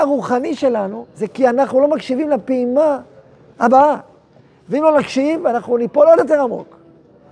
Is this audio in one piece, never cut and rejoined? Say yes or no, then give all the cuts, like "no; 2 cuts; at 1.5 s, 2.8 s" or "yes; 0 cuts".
yes; 0 cuts